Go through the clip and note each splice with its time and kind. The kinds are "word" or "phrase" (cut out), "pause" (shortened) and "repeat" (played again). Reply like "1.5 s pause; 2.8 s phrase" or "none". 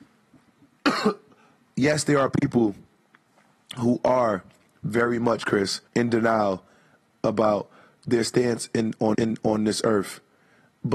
5.9 s pause; 9.1 s repeat